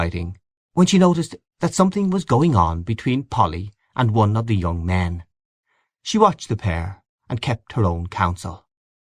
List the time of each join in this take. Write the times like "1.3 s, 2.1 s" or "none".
none